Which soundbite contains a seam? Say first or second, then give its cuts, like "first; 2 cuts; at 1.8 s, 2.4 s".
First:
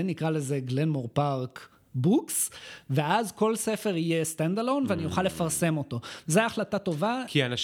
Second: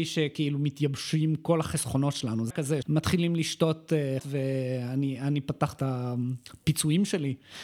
second; 4 cuts; at 2.5 s, 2.8 s, 4.2 s, 5.8 s